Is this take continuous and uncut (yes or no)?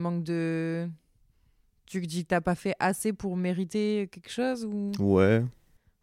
yes